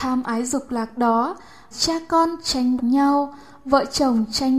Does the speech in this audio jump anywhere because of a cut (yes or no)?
yes